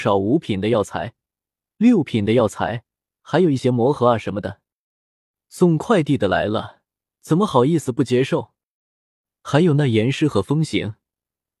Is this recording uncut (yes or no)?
yes